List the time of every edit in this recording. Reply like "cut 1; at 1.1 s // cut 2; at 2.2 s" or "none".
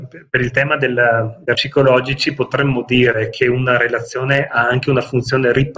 cut 1; at 1.5 s